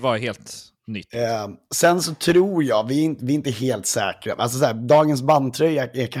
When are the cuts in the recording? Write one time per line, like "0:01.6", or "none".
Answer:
none